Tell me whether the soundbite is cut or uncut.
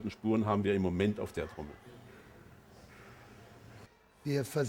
uncut